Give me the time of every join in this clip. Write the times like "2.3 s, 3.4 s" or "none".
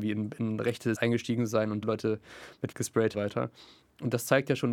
0.9 s, 1.8 s, 2.7 s, 3.1 s